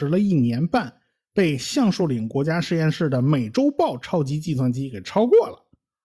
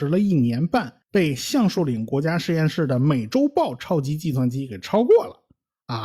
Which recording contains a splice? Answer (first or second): second